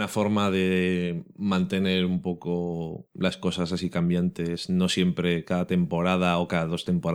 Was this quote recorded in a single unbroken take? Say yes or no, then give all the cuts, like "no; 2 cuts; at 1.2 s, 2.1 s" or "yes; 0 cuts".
yes; 0 cuts